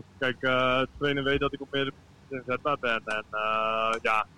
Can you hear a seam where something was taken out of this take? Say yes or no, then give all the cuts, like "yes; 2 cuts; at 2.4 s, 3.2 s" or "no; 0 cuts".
no; 0 cuts